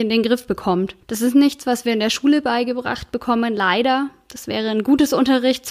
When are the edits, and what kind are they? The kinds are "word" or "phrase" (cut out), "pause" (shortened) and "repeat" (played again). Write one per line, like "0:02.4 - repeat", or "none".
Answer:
0:01.0 - pause